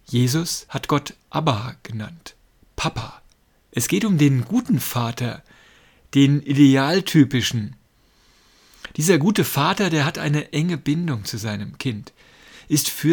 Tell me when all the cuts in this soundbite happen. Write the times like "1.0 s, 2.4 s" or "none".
none